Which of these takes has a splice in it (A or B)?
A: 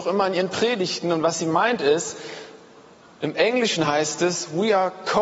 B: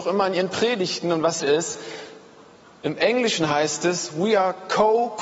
B